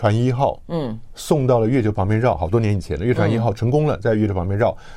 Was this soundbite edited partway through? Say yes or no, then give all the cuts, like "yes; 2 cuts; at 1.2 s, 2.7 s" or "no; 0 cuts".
no; 0 cuts